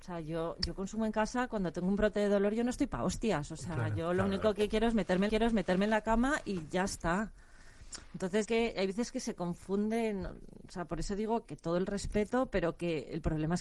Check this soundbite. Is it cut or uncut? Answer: cut